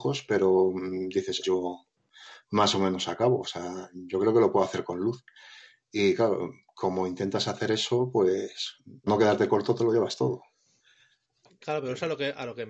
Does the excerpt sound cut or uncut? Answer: cut